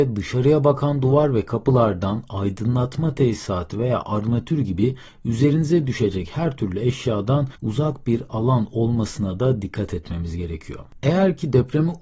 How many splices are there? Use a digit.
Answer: 1